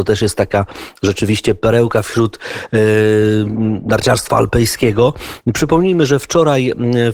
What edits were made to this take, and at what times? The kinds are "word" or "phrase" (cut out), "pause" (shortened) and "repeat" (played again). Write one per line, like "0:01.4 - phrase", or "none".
none